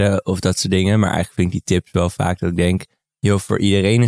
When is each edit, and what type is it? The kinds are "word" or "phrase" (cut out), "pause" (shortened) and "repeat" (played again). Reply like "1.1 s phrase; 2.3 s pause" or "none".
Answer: none